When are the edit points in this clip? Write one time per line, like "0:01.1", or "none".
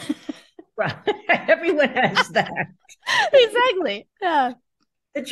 0:04.1